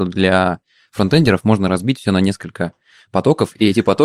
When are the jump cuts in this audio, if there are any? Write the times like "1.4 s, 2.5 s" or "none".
none